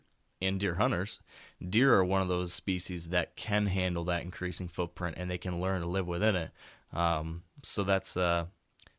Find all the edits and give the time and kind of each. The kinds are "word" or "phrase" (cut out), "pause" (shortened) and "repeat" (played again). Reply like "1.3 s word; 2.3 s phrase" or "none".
none